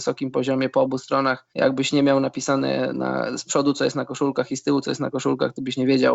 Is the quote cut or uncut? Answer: cut